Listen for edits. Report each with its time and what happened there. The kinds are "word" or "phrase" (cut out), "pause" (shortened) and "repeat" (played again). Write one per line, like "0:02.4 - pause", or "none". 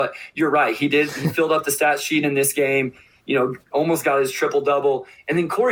0:03.6 - word